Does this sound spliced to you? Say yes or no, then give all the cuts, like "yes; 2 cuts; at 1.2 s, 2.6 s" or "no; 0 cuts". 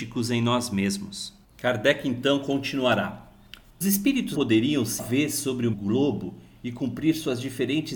yes; 5 cuts; at 1.4 s, 3.8 s, 4.3 s, 5.0 s, 5.7 s